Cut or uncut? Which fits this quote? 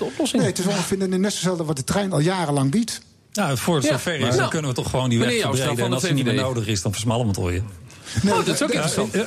uncut